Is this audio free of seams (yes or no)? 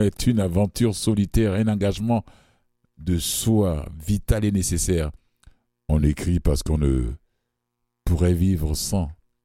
yes